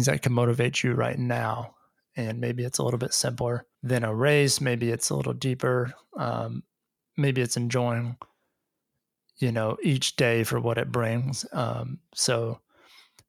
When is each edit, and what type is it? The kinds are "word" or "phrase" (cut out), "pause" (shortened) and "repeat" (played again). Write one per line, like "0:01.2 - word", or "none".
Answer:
0:03.7 - pause